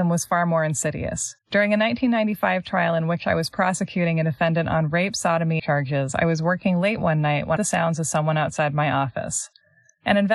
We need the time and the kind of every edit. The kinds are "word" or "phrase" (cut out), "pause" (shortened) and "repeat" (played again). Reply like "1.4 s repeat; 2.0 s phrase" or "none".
5.6 s phrase; 7.6 s phrase